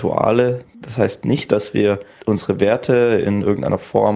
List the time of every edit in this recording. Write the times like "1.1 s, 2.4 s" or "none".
none